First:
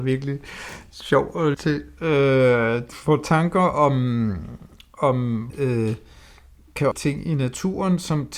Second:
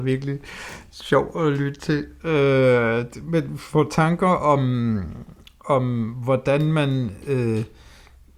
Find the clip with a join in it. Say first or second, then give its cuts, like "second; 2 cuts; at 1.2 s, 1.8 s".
first; 4 cuts; at 1.5 s, 2.9 s, 5.5 s, 6.9 s